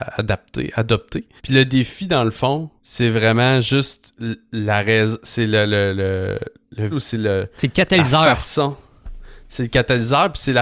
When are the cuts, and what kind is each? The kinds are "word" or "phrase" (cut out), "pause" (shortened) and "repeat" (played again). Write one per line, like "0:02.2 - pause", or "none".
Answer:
0:01.4 - pause
0:02.8 - pause
0:06.9 - word